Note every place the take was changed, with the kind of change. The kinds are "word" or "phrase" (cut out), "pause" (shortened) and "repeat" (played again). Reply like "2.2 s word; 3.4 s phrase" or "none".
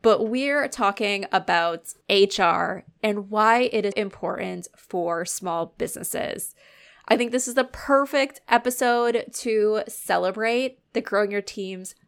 2.0 s pause; 3.9 s word

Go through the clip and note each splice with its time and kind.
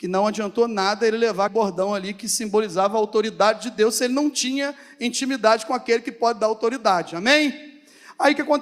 1.5 s word

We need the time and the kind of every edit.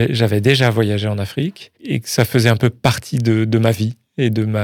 1.8 s pause

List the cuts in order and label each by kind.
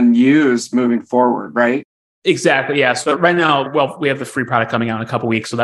none

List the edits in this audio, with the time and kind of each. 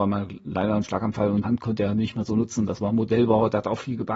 1.4 s word

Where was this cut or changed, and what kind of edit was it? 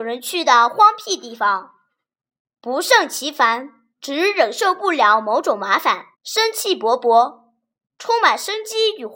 3.9 s pause; 6.1 s pause

